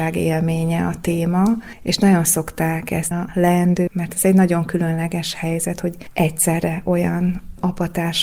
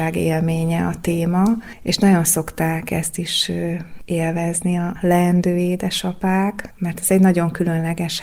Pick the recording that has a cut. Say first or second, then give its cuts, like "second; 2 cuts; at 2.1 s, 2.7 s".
first; 2 cuts; at 3.1 s, 3.9 s